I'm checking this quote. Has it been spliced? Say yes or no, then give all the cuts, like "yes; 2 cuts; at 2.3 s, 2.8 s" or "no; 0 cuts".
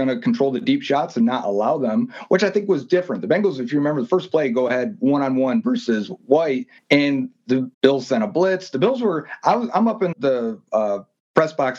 yes; 3 cuts; at 6.8 s, 7.7 s, 10.1 s